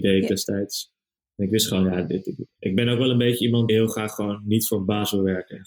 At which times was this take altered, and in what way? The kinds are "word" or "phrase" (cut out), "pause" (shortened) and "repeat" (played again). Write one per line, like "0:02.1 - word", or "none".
0:01.2 - pause
0:03.7 - word